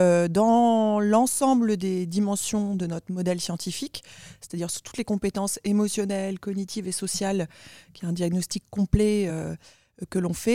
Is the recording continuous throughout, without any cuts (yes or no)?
yes